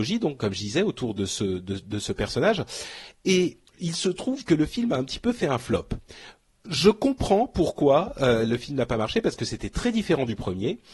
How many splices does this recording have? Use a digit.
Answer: 1